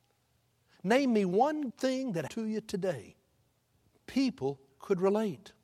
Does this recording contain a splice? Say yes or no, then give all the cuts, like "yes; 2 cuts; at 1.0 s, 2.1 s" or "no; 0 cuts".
yes; 3 cuts; at 1.7 s, 2.3 s, 3.7 s